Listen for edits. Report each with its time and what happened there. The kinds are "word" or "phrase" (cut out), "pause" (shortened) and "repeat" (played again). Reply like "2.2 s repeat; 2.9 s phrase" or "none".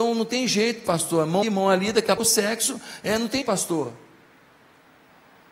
1.4 s word; 2.2 s word; 3.4 s word